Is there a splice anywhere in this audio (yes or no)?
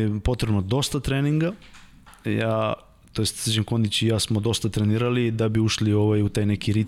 no